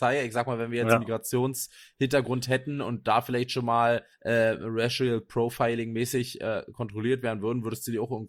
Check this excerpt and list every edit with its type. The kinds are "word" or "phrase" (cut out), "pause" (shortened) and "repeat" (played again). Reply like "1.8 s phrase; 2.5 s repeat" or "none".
4.1 s pause